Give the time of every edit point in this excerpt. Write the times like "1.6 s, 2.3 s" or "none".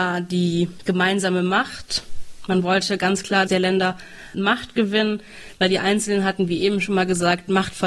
3.5 s, 4.3 s

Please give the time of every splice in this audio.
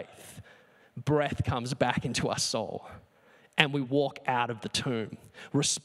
none

